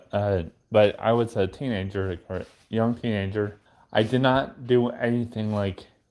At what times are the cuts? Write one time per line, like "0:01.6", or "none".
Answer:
0:03.7